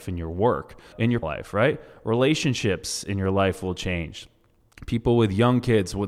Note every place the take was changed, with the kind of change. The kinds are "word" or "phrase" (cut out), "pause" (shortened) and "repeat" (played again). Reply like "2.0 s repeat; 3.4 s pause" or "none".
0.9 s word; 1.2 s word